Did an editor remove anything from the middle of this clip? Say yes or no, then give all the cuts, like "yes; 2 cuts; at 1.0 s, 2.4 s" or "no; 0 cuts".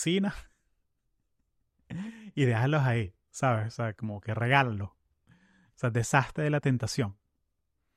yes; 1 cut; at 3.2 s